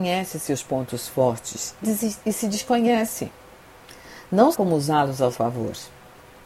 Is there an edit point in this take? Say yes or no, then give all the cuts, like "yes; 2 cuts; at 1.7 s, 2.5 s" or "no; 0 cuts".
yes; 3 cuts; at 1.8 s, 4.5 s, 5.3 s